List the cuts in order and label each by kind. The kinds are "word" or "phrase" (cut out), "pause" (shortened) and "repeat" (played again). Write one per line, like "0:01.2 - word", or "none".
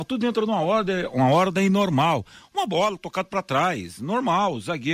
none